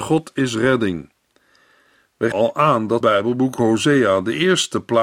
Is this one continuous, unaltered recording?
no; 2 cuts; at 2.3 s, 3.0 s

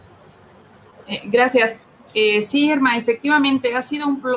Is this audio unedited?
yes; 0 cuts

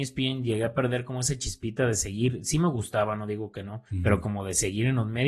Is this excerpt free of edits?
no; 1 cut; at 3.9 s

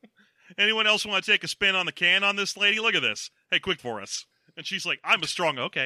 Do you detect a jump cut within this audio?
yes; 2 cuts; at 3.8 s, 4.3 s

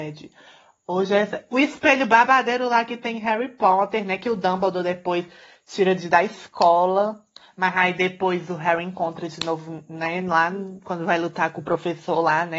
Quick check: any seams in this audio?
no; 0 cuts

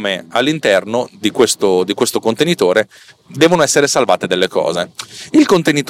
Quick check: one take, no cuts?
yes; 0 cuts

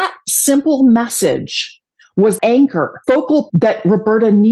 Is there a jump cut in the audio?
yes; 3 cuts; at 2.4 s, 3.0 s, 3.5 s

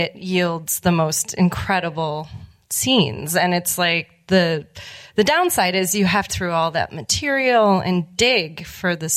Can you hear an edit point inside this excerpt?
yes; 1 cut; at 6.3 s

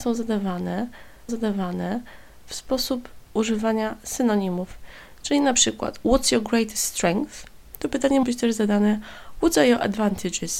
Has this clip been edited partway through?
yes; 2 cuts; at 1.3 s, 8.2 s

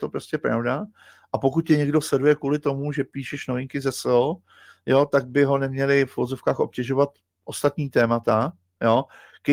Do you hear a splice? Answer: no; 0 cuts

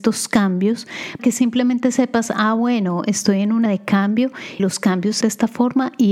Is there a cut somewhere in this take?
yes; 4 cuts; at 1.2 s, 3.7 s, 4.6 s, 5.2 s

